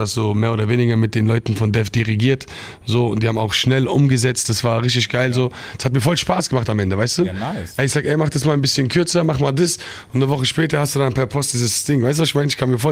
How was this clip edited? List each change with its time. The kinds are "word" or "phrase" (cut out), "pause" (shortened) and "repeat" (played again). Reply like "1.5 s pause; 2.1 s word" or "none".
none